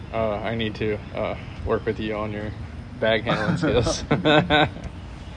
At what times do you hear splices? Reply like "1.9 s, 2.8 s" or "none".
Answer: none